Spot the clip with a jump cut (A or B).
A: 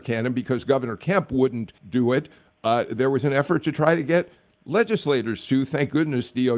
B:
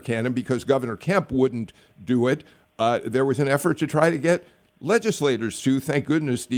A